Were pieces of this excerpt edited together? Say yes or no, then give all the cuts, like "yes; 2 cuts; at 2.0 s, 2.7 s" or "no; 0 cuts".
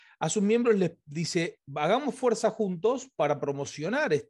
no; 0 cuts